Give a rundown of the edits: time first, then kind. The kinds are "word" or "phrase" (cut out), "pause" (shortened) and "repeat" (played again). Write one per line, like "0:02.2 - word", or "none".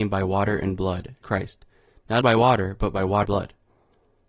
0:01.2 - word
0:02.2 - word
0:03.2 - word